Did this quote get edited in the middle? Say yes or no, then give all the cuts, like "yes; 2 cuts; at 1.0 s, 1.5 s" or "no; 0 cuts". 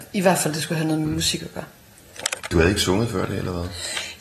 no; 0 cuts